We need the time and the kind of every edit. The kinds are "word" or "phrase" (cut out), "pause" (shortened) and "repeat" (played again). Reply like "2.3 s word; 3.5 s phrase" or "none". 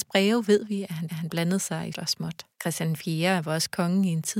1.1 s repeat; 1.9 s word; 2.5 s pause